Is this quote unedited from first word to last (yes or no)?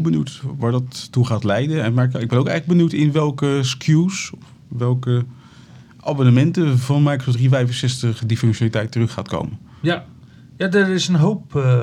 yes